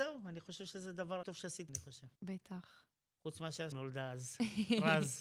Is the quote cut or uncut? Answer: cut